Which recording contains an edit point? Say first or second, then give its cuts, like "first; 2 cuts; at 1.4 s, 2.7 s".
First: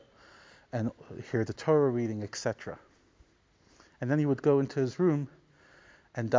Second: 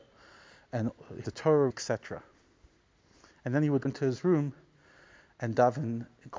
second; 3 cuts; at 1.2 s, 1.7 s, 3.8 s